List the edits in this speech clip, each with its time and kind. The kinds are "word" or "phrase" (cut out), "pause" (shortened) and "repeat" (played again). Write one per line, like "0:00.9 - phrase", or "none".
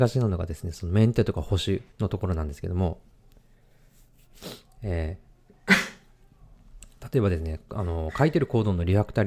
0:01.9 - pause
0:05.3 - pause